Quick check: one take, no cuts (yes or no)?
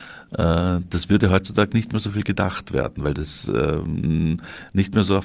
yes